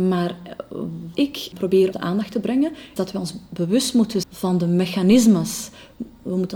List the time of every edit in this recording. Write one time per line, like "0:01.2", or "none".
0:01.1
0:01.5
0:01.9
0:03.0
0:04.2